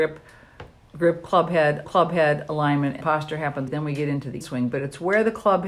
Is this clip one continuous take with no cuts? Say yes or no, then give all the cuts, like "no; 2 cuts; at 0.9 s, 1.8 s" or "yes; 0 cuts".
no; 4 cuts; at 1.8 s, 3.0 s, 3.7 s, 4.4 s